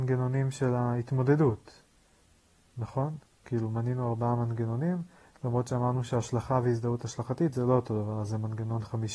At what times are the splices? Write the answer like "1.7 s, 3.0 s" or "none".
none